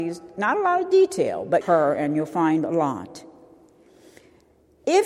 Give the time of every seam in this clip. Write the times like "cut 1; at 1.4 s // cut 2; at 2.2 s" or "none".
cut 1; at 1.6 s